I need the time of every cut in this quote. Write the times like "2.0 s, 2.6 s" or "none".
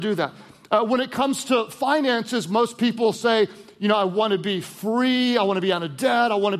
none